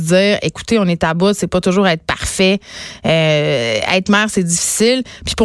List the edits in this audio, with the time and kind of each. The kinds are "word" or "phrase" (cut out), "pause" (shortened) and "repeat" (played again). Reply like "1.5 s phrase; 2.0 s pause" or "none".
none